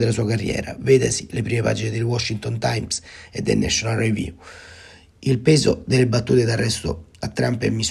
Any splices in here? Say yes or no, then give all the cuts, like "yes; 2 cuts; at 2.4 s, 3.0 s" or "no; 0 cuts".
no; 0 cuts